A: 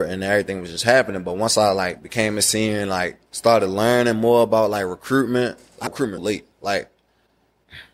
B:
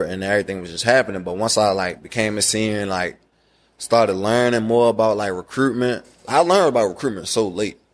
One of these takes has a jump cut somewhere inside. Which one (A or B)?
A